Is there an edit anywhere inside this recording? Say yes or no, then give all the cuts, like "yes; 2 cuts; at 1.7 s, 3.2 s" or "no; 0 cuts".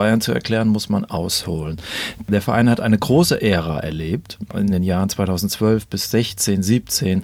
no; 0 cuts